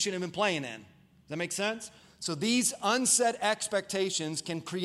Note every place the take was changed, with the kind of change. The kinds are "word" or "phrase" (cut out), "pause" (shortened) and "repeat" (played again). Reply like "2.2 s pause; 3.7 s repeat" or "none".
none

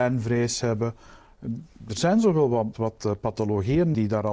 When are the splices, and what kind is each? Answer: 2.7 s word

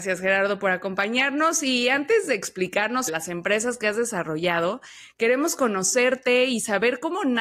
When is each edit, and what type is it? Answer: 3.1 s word

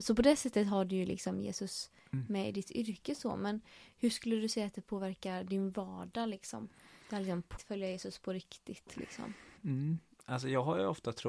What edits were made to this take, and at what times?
7.0 s pause; 7.6 s word; 9.6 s pause

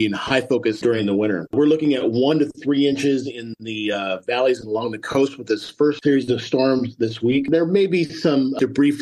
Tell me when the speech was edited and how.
none

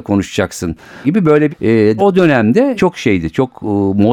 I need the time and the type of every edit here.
1.0 s word; 1.5 s word; 2.0 s word; 2.8 s word

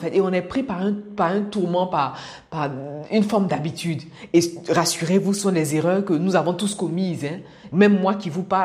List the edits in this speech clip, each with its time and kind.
none

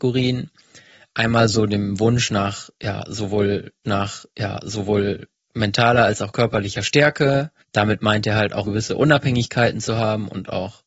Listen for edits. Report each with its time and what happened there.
3.8 s repeat; 7.6 s pause; 8.6 s word

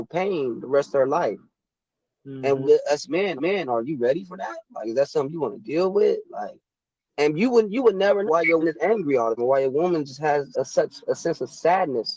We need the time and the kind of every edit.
1.8 s pause; 3.4 s repeat; 7.0 s pause; 8.3 s word; 8.6 s word; 9.4 s word; 10.5 s word

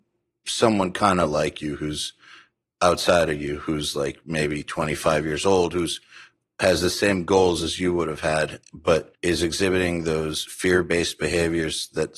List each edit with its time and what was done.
9.1 s pause

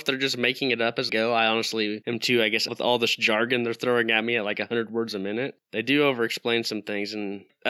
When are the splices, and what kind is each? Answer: 1.1 s word; 2.7 s phrase

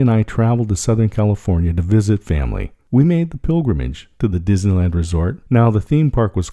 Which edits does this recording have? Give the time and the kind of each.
2.8 s pause; 5.5 s pause

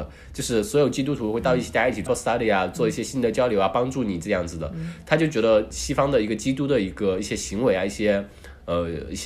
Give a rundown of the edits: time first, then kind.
2.1 s word; 5.7 s word

